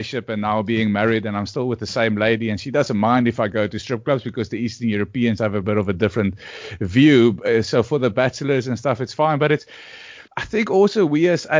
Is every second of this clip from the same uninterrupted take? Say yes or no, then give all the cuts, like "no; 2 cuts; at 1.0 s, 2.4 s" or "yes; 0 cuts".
no; 2 cuts; at 5.4 s, 10.3 s